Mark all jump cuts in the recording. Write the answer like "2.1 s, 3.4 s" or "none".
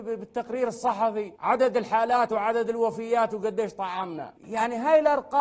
1.3 s, 4.4 s